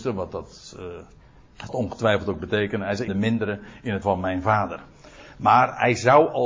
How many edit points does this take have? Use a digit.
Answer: 3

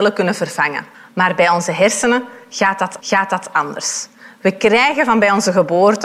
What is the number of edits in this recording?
2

